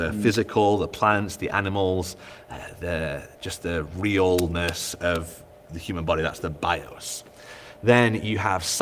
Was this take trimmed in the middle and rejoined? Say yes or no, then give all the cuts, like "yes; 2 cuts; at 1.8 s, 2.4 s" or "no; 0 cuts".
no; 0 cuts